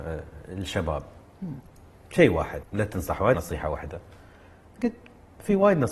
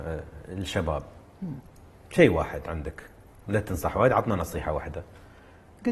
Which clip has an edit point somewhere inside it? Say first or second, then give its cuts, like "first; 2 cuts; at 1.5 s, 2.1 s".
first; 2 cuts; at 2.6 s, 3.3 s